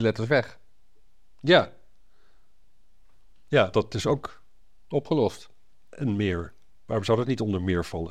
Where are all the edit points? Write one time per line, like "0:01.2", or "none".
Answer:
0:03.7

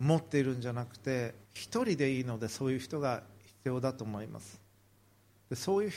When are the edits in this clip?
0:01.4

